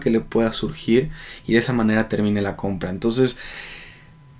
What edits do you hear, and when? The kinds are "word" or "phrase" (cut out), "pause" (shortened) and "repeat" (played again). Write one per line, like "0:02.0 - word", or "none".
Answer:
none